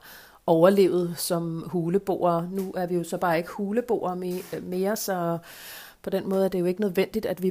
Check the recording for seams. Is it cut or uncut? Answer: uncut